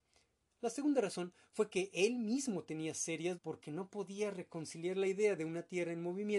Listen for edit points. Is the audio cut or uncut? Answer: cut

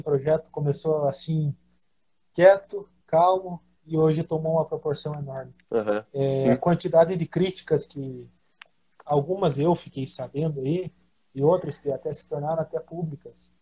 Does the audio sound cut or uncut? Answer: uncut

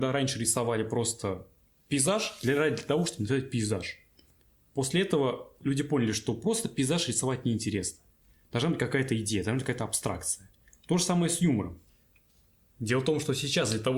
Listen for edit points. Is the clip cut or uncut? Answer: uncut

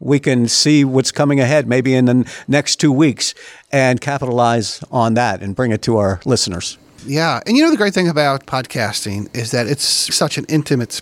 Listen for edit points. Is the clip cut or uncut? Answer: cut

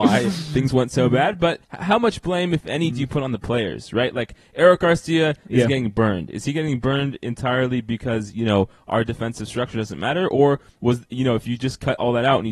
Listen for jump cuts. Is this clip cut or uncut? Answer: cut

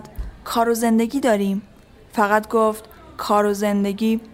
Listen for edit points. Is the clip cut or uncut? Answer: uncut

